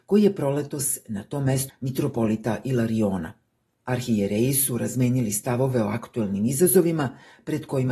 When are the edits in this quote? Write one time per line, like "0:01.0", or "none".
0:01.7